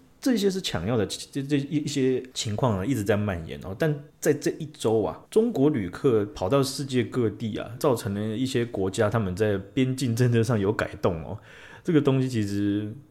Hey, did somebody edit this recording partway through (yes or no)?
yes